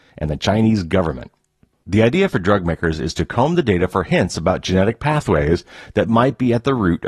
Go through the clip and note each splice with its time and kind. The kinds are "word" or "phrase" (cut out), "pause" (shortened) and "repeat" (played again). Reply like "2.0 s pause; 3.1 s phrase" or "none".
none